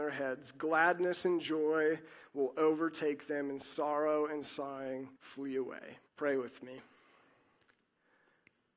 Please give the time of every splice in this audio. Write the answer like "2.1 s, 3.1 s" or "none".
5.2 s, 6.1 s